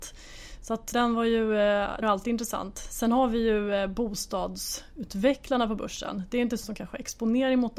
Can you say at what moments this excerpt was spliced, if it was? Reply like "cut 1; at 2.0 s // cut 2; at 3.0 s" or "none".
cut 1; at 0.9 s // cut 2; at 2.0 s // cut 3; at 6.6 s